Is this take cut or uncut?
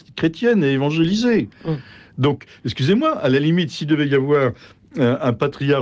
uncut